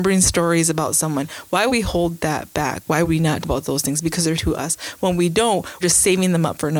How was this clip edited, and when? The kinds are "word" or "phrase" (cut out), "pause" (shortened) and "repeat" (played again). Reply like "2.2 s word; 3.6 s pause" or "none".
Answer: 1.7 s word; 3.0 s word; 3.4 s word; 4.4 s word; 5.8 s word